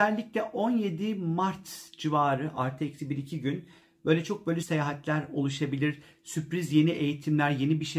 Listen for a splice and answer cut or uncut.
cut